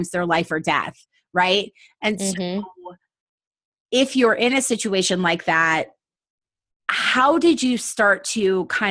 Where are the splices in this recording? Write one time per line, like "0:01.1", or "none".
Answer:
none